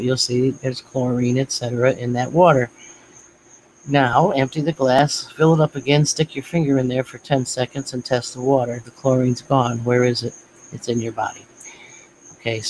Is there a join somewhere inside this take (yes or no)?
no